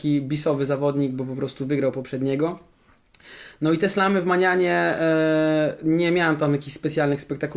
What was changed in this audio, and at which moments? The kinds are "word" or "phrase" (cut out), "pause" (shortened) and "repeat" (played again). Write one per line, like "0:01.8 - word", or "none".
none